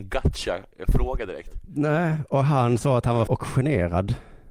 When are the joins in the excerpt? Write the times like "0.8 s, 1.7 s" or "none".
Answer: 3.3 s

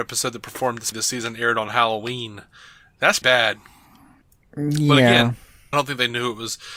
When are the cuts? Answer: 0.9 s, 3.2 s, 5.7 s

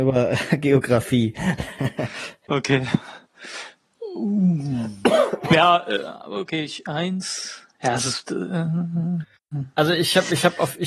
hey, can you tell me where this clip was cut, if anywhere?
7.7 s

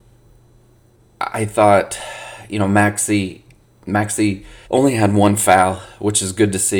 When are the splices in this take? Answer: 4.6 s

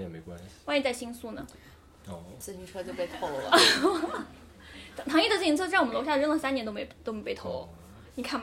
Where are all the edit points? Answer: none

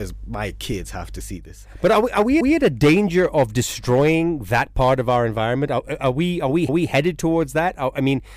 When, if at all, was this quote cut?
2.4 s, 6.7 s

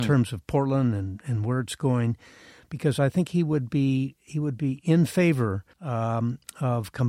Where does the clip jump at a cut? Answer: 5.7 s

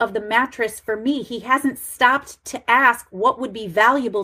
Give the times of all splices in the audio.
none

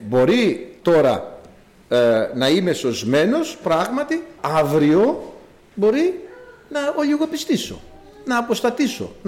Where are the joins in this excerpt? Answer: 4.4 s

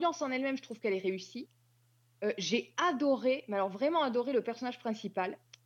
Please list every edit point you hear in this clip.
none

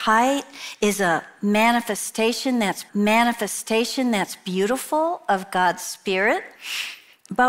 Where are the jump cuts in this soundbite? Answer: 2.9 s

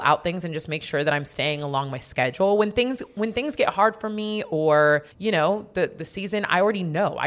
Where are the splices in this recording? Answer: 5.1 s

